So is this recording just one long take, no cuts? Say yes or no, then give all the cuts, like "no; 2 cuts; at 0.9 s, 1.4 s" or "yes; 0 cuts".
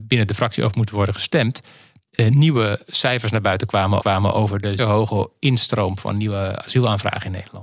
no; 2 cuts; at 4.0 s, 4.8 s